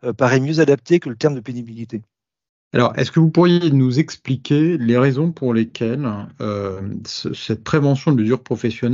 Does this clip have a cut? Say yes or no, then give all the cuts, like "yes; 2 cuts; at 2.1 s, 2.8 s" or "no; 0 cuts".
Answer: yes; 1 cut; at 2.5 s